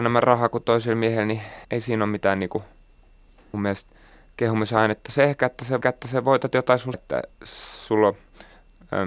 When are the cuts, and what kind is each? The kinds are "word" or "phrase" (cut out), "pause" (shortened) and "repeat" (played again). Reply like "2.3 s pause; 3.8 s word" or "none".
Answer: 1.6 s pause; 3.5 s word; 5.8 s repeat; 6.9 s word; 7.3 s pause